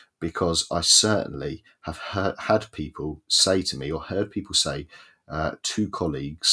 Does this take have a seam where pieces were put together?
no; 0 cuts

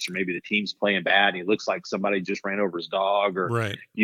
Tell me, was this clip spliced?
no; 0 cuts

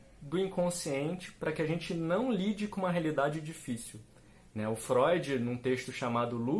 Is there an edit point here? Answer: no; 0 cuts

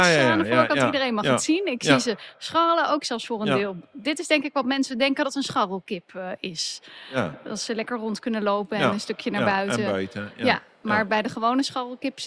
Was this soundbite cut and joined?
no; 0 cuts

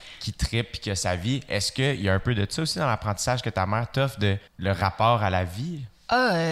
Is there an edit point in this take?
yes; 1 cut; at 4.5 s

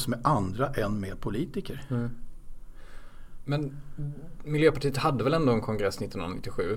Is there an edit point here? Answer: no; 0 cuts

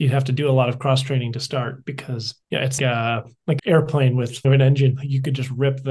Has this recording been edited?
yes; 4 cuts; at 2.4 s, 2.8 s, 3.6 s, 4.4 s

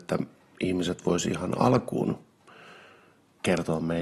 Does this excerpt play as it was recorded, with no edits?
yes; 0 cuts

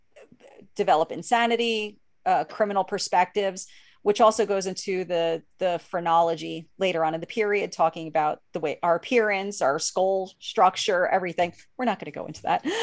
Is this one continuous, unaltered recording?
yes; 0 cuts

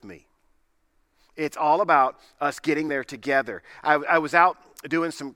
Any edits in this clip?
no; 0 cuts

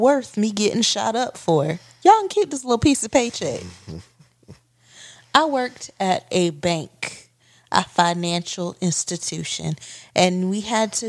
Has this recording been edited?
no; 0 cuts

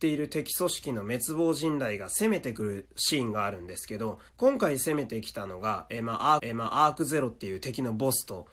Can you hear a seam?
yes; 2 cuts; at 4.3 s, 6.4 s

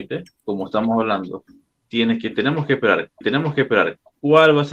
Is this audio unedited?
no; 2 cuts; at 1.7 s, 3.2 s

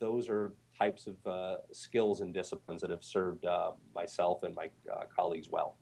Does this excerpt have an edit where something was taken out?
no; 0 cuts

